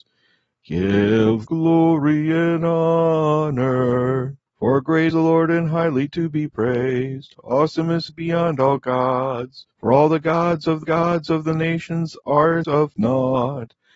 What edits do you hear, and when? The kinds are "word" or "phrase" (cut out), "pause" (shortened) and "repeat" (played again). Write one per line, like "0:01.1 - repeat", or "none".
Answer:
0:01.5 - phrase
0:04.5 - pause
0:05.1 - word
0:08.1 - word
0:09.7 - pause
0:10.8 - repeat
0:12.6 - word